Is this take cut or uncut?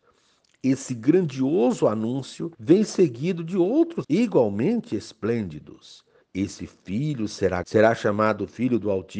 cut